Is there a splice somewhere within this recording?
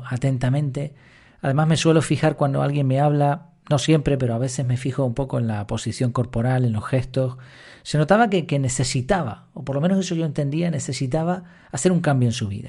no; 0 cuts

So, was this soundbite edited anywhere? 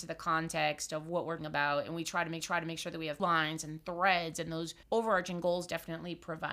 yes; 4 cuts; at 1.4 s, 2.4 s, 3.2 s, 4.8 s

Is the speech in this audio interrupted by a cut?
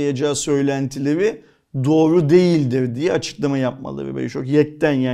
no; 0 cuts

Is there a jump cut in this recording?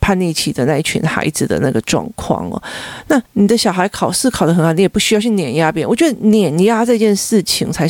yes; 1 cut; at 3.3 s

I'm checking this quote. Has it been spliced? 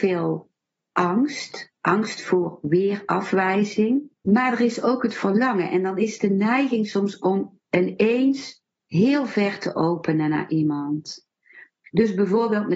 yes; 1 cut; at 4.2 s

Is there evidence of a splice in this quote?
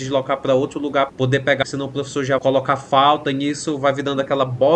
yes; 3 cuts; at 1.1 s, 1.6 s, 2.4 s

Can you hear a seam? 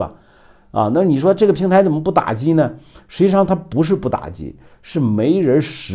no; 0 cuts

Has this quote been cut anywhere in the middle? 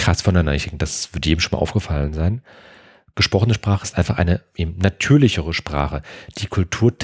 no; 0 cuts

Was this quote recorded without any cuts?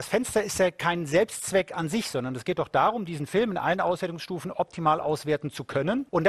yes; 0 cuts

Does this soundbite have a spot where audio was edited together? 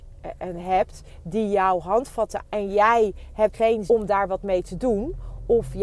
yes; 3 cuts; at 2.4 s, 3.5 s, 3.9 s

